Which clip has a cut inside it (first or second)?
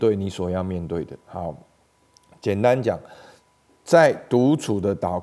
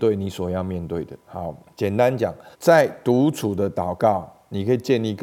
second